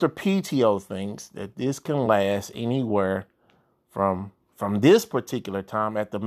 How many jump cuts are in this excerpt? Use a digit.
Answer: 0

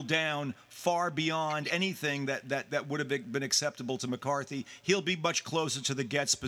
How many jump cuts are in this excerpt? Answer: 0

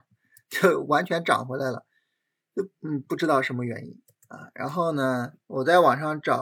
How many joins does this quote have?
2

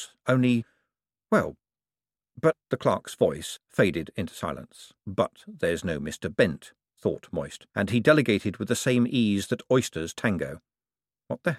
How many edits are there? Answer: 3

